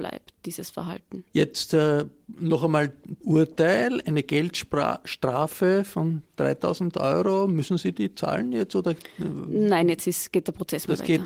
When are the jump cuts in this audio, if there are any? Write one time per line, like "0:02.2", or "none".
0:01.3
0:03.2